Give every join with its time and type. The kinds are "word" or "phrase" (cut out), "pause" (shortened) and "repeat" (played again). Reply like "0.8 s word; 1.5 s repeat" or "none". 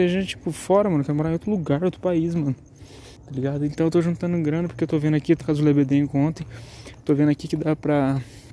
3.1 s pause; 5.4 s word